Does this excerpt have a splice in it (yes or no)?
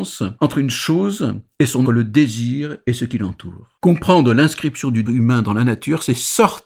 yes